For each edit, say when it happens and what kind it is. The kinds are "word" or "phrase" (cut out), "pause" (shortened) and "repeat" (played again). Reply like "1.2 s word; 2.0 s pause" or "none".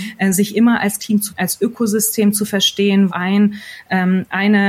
1.0 s word; 1.3 s word; 3.1 s word